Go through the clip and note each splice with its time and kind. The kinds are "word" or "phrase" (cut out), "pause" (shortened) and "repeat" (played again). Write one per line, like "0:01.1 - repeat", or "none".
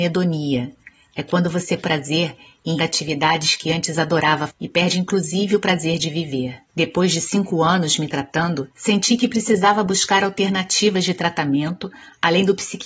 0:01.8 - word
0:02.8 - word
0:04.5 - word
0:06.7 - pause
0:08.7 - pause